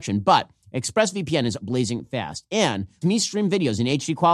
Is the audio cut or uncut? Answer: cut